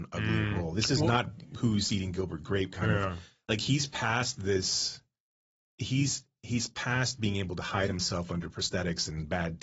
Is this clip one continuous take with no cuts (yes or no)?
yes